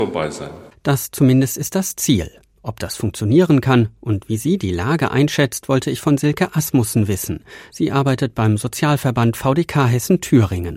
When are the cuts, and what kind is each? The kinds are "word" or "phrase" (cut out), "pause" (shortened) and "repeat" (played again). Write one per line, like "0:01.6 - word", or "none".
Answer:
none